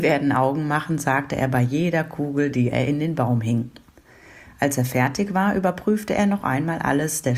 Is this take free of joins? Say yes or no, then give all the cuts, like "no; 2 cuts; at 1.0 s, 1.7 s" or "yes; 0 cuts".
yes; 0 cuts